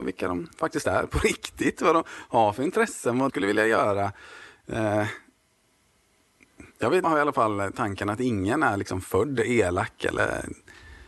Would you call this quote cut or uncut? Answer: cut